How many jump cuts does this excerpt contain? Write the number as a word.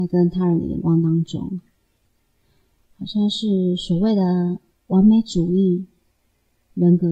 zero